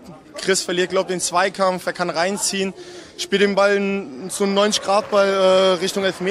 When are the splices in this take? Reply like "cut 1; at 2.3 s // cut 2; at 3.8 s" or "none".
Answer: none